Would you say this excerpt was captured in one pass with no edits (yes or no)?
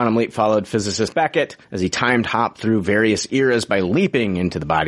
no